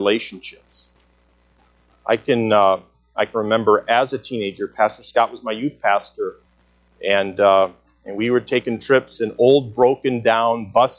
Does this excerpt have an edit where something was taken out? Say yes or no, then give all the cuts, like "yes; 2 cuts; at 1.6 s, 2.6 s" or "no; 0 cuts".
no; 0 cuts